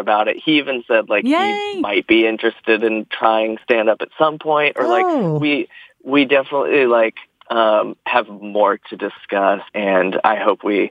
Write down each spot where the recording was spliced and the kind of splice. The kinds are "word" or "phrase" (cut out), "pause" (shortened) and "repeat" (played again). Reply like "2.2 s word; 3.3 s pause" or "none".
9.7 s pause